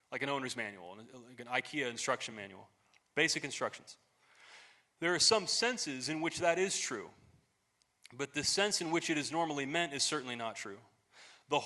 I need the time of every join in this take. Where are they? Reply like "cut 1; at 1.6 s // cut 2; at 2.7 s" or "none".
none